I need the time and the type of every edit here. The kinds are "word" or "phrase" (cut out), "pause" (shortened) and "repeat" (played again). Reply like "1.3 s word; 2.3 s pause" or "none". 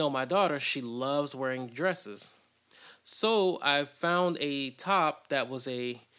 none